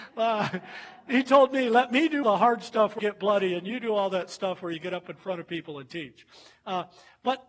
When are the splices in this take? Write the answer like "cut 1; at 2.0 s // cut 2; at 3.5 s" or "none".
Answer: cut 1; at 2.2 s // cut 2; at 3.0 s